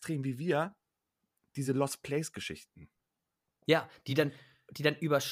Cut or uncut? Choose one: uncut